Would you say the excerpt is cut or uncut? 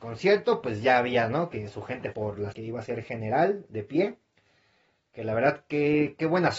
cut